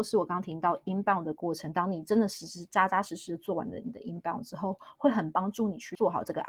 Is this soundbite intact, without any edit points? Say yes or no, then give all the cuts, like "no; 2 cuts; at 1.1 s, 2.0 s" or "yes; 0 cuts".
yes; 0 cuts